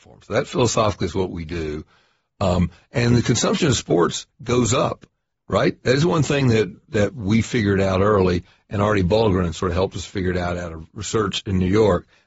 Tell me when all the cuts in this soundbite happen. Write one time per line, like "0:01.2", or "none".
none

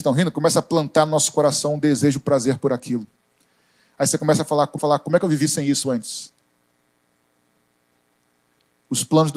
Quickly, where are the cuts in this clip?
0:04.8

